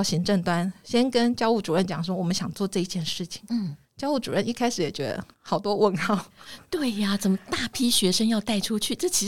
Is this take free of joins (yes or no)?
no